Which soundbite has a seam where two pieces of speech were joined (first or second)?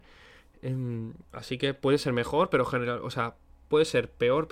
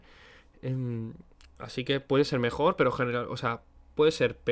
first